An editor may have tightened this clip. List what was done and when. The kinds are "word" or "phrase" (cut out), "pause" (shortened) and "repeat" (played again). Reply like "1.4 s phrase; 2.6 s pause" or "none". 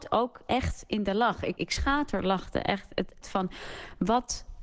1.6 s word; 3.2 s word